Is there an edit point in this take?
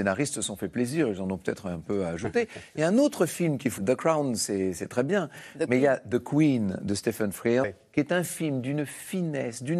yes; 2 cuts; at 3.8 s, 7.6 s

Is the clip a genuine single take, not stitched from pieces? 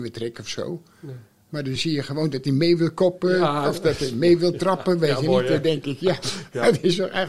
yes; 0 cuts

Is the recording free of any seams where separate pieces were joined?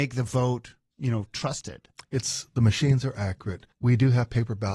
no; 2 cuts; at 2.0 s, 3.7 s

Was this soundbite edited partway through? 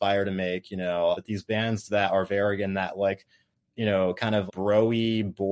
yes; 2 cuts; at 1.1 s, 4.5 s

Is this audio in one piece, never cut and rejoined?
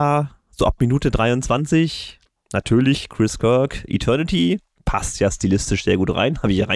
yes; 0 cuts

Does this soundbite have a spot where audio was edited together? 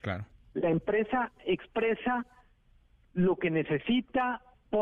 no; 0 cuts

